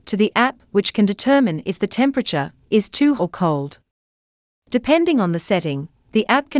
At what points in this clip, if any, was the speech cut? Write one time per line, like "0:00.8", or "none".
0:03.2